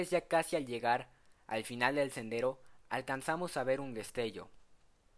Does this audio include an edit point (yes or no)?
no